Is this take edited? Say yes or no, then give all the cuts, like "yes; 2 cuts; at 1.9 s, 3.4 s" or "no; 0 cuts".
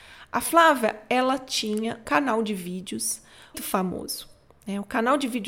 yes; 2 cuts; at 2.0 s, 3.5 s